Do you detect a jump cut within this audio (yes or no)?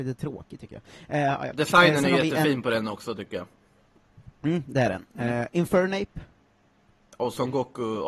no